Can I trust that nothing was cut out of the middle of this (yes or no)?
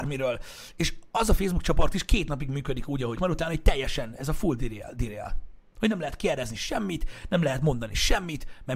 no